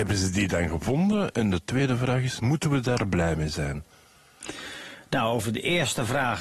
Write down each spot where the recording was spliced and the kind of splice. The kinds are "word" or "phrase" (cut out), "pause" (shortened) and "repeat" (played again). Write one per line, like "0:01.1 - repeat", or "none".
none